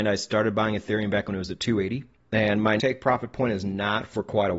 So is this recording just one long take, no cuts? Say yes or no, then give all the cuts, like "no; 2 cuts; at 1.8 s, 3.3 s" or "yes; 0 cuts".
no; 2 cuts; at 2.1 s, 2.8 s